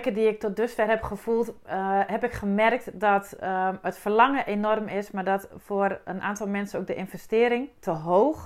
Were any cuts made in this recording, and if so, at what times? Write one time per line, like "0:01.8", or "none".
none